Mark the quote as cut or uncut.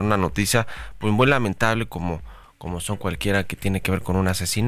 uncut